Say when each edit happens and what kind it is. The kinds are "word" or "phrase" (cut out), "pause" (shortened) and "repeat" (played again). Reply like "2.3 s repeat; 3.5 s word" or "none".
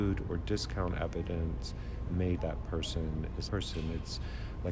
2.1 s word; 2.4 s phrase; 3.5 s phrase